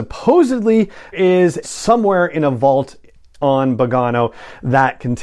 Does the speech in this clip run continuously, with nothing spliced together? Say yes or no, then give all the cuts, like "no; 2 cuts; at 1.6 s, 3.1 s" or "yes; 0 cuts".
no; 2 cuts; at 1.1 s, 1.6 s